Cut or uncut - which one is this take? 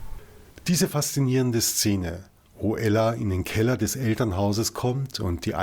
uncut